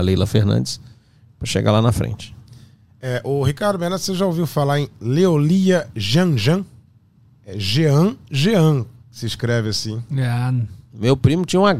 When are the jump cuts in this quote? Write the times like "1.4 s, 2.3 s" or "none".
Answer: none